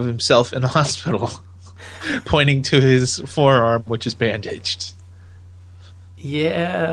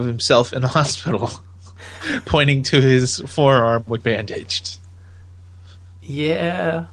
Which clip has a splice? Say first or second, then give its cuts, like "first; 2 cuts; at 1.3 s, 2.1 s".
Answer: second; 1 cut; at 4.0 s